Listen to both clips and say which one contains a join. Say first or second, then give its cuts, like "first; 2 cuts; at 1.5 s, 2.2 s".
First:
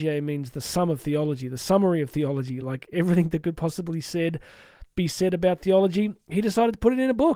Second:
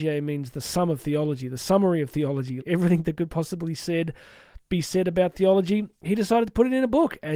second; 1 cut; at 2.6 s